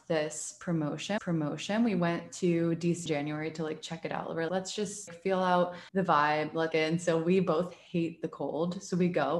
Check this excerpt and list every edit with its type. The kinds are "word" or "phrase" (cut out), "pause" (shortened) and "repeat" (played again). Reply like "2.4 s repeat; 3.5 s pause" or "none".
1.2 s repeat; 3.1 s word; 4.5 s word; 5.1 s word; 5.9 s pause; 6.7 s phrase